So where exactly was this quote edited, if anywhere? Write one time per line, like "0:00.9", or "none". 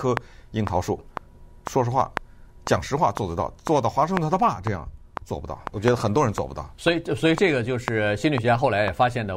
0:05.7